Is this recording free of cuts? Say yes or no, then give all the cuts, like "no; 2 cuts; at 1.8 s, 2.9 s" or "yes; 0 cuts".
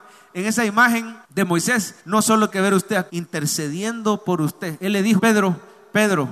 no; 5 cuts; at 1.2 s, 2.0 s, 2.5 s, 3.1 s, 5.2 s